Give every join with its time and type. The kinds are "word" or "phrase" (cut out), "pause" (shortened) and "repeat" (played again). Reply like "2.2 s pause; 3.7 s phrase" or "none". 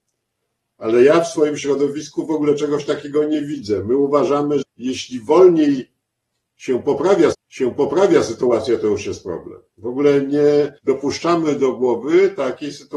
4.6 s word; 7.3 s repeat; 10.8 s pause

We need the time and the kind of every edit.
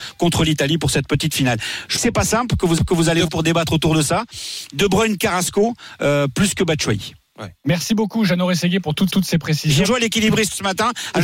2.0 s phrase; 2.8 s repeat; 3.3 s word; 5.2 s phrase; 9.1 s repeat; 9.8 s word

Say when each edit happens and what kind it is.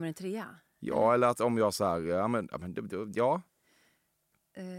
none

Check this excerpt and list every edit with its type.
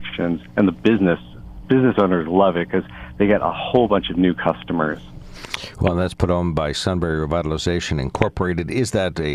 1.6 s word

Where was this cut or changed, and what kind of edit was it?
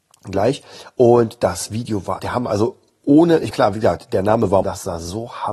2.2 s word; 3.5 s word; 4.6 s phrase

